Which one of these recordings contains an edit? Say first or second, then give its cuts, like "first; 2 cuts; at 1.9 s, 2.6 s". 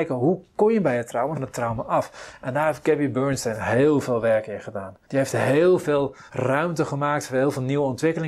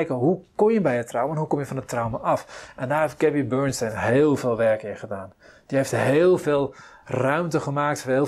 first; 3 cuts; at 1.3 s, 5.0 s, 6.3 s